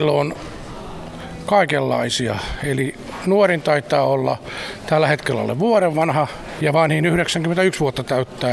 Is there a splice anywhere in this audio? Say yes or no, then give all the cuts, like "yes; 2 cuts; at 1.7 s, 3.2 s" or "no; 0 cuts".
no; 0 cuts